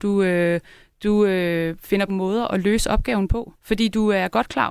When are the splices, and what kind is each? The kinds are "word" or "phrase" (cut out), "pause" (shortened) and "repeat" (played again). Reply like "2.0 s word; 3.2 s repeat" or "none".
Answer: 2.1 s phrase; 3.6 s pause